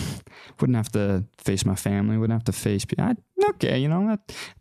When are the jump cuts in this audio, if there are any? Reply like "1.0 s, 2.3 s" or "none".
none